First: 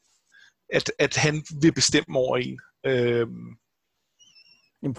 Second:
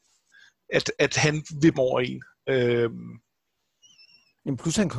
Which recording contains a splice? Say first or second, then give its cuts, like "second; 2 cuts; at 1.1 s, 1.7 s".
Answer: second; 1 cut; at 1.7 s